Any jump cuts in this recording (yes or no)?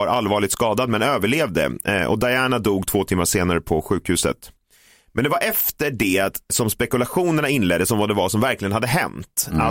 no